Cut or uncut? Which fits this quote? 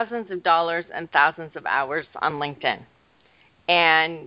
uncut